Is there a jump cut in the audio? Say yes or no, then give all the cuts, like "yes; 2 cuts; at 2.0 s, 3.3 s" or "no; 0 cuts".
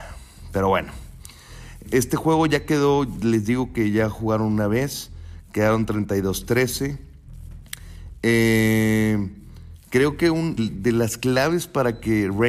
yes; 2 cuts; at 1.8 s, 10.6 s